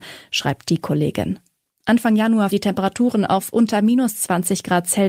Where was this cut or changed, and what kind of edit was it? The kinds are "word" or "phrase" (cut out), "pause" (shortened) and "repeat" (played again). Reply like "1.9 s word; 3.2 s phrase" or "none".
2.5 s word